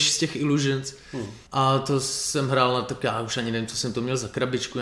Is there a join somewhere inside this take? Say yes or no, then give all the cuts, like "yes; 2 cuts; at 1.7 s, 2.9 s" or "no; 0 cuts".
yes; 1 cut; at 1.5 s